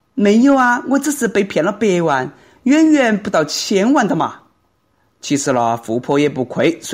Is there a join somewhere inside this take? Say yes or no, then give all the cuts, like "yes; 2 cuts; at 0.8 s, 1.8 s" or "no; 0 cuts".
no; 0 cuts